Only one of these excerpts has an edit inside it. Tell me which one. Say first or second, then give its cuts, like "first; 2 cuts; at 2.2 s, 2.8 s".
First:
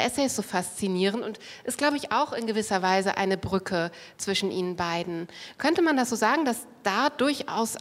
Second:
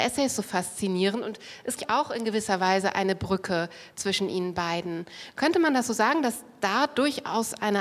second; 1 cut; at 1.8 s